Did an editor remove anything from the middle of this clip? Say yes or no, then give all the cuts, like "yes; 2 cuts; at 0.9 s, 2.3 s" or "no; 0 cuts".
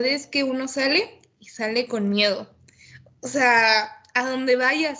no; 0 cuts